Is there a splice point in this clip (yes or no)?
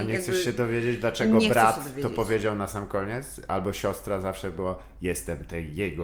no